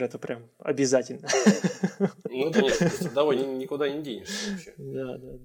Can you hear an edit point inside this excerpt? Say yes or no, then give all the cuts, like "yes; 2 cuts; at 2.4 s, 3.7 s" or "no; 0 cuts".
yes; 2 cuts; at 2.5 s, 3.4 s